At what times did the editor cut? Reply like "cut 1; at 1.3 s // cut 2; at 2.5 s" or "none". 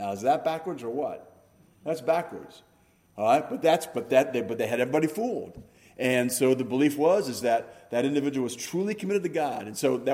none